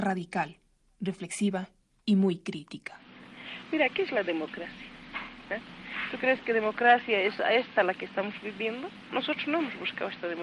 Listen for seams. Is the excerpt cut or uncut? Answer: uncut